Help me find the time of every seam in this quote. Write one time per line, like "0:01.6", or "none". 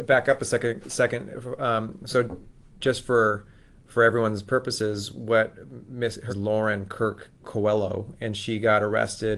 0:06.3